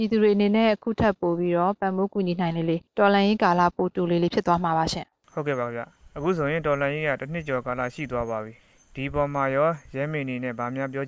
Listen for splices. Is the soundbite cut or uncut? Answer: cut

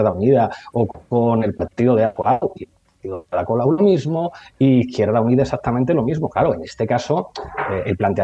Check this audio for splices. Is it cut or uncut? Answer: uncut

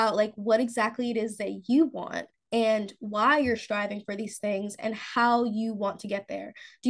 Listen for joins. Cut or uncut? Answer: cut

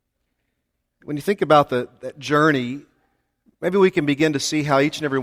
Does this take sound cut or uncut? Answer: uncut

